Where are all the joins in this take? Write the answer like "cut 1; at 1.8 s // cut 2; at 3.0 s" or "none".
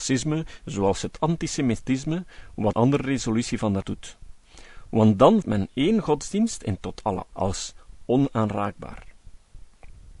cut 1; at 2.7 s // cut 2; at 3.8 s // cut 3; at 5.4 s // cut 4; at 6.8 s // cut 5; at 7.3 s

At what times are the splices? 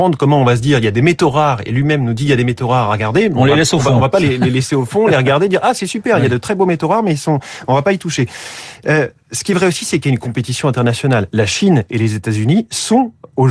none

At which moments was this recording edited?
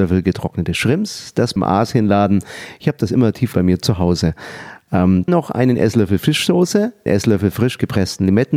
cut 1; at 1.6 s // cut 2; at 3.5 s // cut 3; at 5.3 s // cut 4; at 7.1 s

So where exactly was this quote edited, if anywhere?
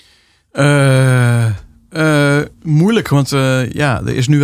cut 1; at 2.5 s

